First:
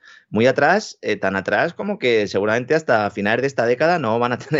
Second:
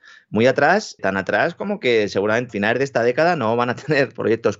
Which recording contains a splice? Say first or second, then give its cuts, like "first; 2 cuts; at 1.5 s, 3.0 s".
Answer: second; 2 cuts; at 1.0 s, 2.5 s